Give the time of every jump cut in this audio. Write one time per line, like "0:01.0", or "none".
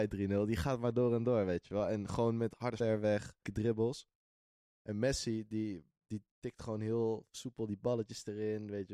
0:02.8
0:03.4